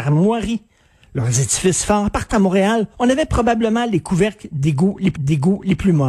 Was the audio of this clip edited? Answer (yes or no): yes